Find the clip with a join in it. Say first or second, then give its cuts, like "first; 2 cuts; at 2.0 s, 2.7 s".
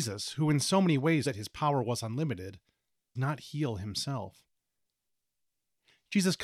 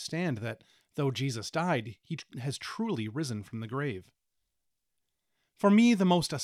first; 2 cuts; at 1.2 s, 3.2 s